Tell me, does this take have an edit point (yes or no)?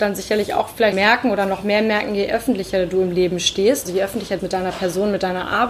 yes